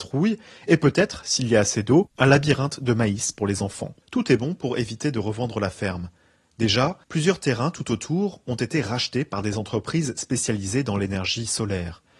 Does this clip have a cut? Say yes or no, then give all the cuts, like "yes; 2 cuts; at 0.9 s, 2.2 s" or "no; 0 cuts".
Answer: yes; 3 cuts; at 2.1 s, 4.0 s, 7.0 s